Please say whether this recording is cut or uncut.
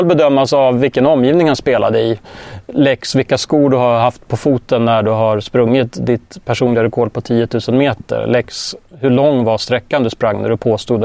uncut